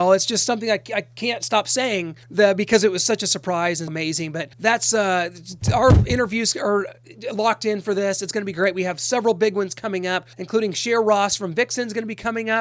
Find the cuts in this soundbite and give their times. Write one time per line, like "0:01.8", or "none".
0:02.2
0:03.9
0:04.5
0:10.3